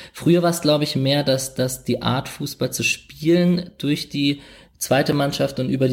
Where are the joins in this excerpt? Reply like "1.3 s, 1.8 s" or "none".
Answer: none